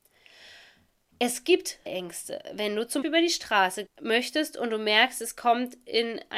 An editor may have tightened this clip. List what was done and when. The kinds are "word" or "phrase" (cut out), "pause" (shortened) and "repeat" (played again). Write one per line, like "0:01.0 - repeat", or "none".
0:01.9 - word
0:03.0 - word
0:03.9 - word